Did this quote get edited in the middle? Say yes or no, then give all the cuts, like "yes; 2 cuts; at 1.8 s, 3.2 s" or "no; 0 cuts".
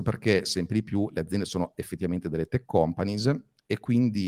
no; 0 cuts